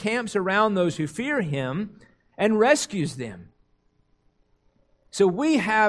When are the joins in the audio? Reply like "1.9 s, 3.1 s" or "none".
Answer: none

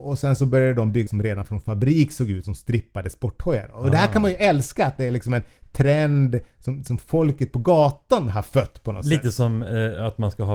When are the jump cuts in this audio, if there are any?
1.1 s, 2.4 s

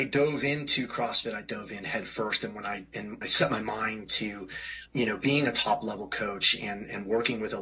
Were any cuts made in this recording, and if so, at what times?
3.2 s, 4.9 s

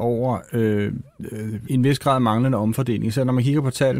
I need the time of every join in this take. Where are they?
1.7 s

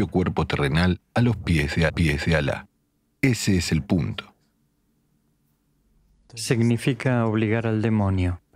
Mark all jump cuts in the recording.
1.9 s

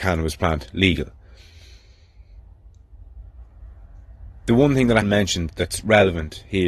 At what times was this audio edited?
5.0 s

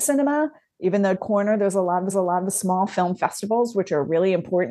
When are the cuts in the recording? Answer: 1.2 s, 2.1 s

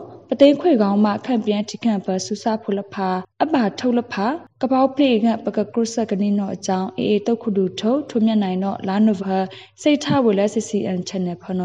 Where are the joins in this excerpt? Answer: 3.3 s, 9.2 s

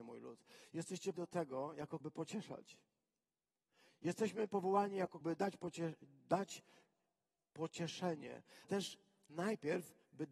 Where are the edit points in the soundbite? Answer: 1.1 s, 2.0 s, 5.2 s, 8.6 s

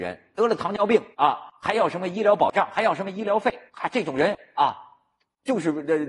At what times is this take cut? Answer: 1.1 s, 3.7 s

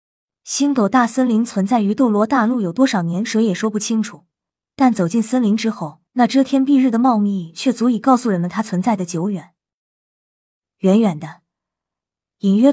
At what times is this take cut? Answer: 4.5 s, 6.1 s

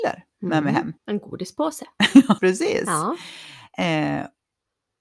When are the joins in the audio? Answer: 1.0 s, 2.4 s

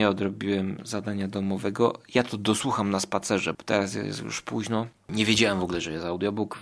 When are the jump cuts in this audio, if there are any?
3.5 s, 4.9 s

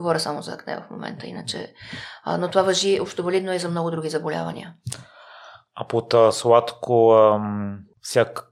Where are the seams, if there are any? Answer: none

